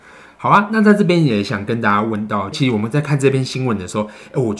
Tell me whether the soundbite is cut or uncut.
cut